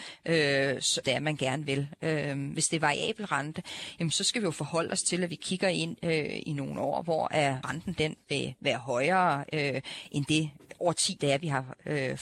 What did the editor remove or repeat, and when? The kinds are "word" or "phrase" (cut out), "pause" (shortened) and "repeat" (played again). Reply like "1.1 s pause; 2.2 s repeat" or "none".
1.0 s word; 7.6 s word; 11.2 s word